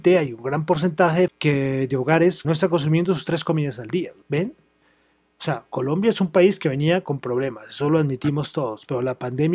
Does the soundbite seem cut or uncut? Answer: cut